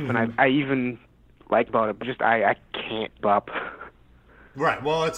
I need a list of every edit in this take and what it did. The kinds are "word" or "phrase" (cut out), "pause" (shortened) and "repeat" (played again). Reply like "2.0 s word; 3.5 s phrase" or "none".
1.7 s word; 2.0 s word; 3.2 s word